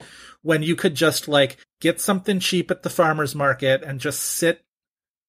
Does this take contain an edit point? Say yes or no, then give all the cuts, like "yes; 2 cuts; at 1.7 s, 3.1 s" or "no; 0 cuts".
yes; 1 cut; at 1.6 s